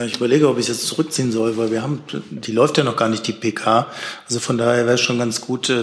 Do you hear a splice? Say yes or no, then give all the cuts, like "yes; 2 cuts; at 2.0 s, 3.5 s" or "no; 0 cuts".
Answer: no; 0 cuts